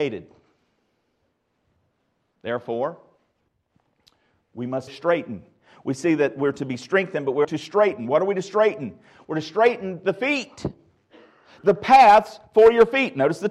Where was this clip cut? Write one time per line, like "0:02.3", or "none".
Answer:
0:04.9
0:07.4